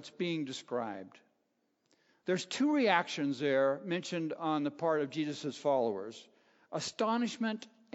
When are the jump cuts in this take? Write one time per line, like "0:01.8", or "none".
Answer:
none